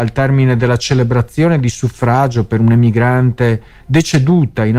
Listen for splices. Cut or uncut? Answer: uncut